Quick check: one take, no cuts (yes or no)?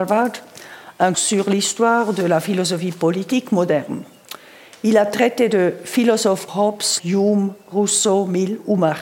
no